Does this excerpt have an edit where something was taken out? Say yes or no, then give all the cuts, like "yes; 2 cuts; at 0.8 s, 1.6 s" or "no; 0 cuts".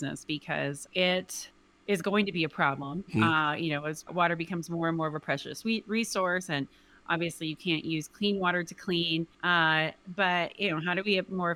yes; 2 cuts; at 4.1 s, 9.3 s